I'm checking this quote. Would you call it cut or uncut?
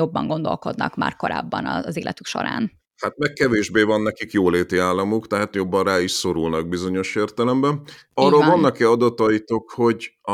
uncut